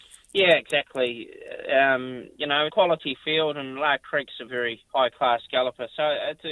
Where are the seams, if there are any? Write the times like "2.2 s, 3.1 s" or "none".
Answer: 2.7 s, 4.5 s, 4.9 s